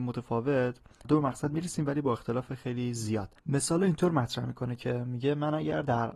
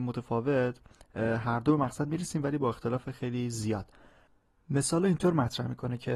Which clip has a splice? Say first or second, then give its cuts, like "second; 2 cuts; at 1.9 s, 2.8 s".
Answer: first; 2 cuts; at 1.0 s, 3.4 s